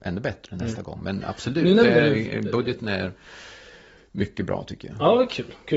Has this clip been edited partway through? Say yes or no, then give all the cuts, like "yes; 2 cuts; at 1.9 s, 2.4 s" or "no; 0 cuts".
no; 0 cuts